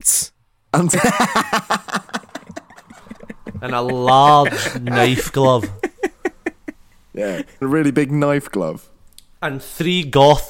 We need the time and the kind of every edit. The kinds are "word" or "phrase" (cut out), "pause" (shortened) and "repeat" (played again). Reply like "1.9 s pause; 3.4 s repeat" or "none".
0.9 s word; 7.6 s word